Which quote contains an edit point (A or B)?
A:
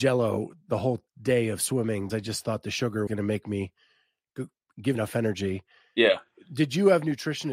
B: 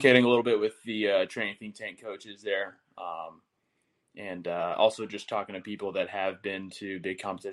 A